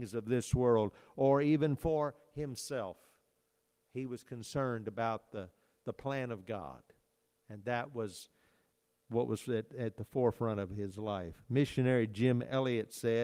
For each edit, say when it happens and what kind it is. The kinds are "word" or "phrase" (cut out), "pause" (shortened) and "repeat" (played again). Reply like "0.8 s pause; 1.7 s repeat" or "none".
none